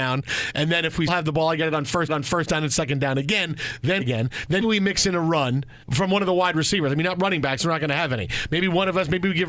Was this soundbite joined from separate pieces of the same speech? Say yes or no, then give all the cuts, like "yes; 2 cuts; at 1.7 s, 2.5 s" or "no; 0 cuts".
yes; 5 cuts; at 1.1 s, 2.1 s, 4.0 s, 4.6 s, 5.8 s